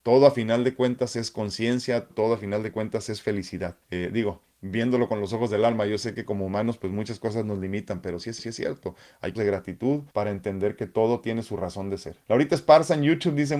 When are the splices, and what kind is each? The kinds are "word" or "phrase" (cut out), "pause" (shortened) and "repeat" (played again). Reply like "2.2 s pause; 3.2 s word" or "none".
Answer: 2.1 s word; 3.8 s pause; 8.4 s repeat; 9.4 s word; 10.1 s pause; 12.2 s pause